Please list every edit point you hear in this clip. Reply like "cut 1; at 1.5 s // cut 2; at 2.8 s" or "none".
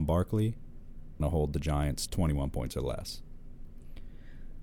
cut 1; at 1.2 s // cut 2; at 2.1 s